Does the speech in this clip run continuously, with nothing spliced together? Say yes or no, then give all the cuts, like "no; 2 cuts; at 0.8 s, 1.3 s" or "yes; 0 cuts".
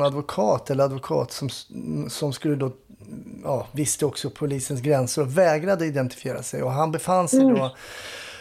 yes; 0 cuts